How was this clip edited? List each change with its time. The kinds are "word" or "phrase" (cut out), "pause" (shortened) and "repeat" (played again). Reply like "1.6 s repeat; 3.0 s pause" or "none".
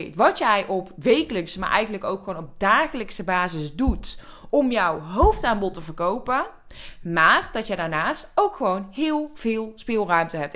none